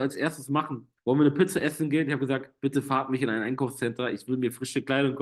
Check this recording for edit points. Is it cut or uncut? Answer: cut